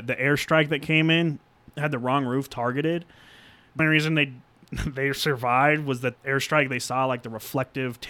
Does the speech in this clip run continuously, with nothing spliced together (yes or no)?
no